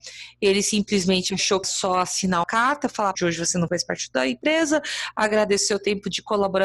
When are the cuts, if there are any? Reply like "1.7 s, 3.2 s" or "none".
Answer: 1.6 s, 2.4 s, 3.1 s, 3.7 s